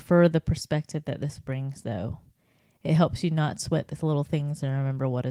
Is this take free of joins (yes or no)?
yes